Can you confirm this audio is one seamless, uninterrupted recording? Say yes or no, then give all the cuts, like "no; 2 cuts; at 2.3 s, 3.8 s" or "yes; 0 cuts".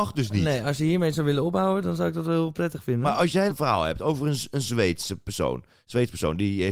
no; 1 cut; at 3.5 s